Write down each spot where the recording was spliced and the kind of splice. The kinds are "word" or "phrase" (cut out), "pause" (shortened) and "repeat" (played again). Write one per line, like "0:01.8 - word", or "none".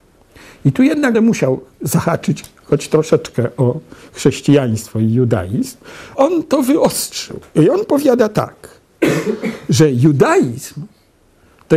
0:01.1 - word
0:06.1 - word